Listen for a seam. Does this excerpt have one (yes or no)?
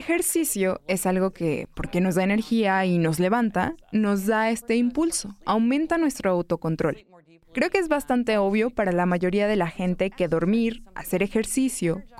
no